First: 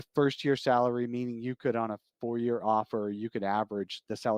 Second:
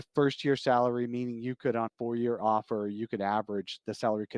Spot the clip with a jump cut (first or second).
second